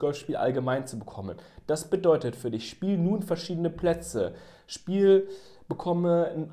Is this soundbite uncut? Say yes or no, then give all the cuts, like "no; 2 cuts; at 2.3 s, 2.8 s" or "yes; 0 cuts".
yes; 0 cuts